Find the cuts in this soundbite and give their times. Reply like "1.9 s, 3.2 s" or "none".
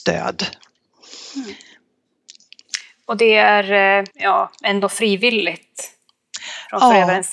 4.1 s